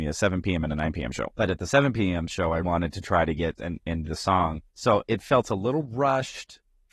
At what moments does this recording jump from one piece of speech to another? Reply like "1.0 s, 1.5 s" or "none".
1.3 s, 2.6 s, 3.6 s, 4.0 s, 4.7 s